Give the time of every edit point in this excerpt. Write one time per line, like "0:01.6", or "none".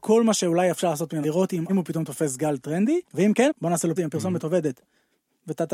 0:01.2
0:01.7
0:03.0
0:03.5
0:04.0